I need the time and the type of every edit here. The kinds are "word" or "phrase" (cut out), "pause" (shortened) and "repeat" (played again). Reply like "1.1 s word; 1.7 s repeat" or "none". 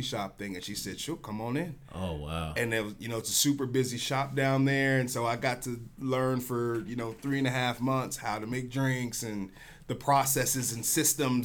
none